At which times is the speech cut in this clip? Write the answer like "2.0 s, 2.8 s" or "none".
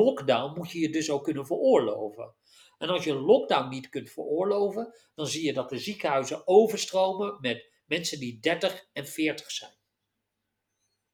none